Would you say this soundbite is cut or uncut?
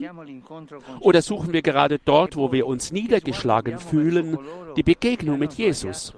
uncut